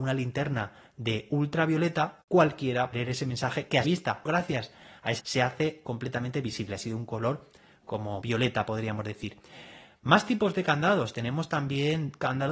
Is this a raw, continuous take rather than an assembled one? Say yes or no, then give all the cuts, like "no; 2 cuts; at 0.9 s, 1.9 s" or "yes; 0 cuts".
no; 5 cuts; at 2.9 s, 3.8 s, 4.3 s, 5.2 s, 8.2 s